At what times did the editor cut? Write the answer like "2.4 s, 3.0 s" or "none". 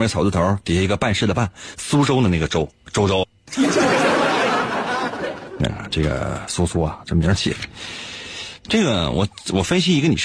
3.2 s